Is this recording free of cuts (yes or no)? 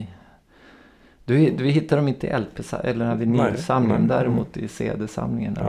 yes